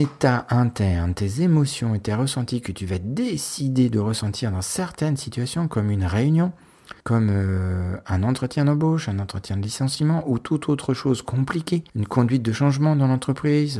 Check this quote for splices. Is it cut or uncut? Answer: cut